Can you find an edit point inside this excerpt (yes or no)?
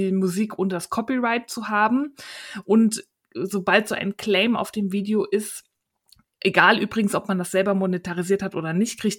no